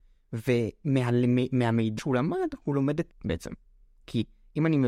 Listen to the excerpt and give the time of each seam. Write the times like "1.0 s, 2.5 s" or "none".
2.0 s, 3.1 s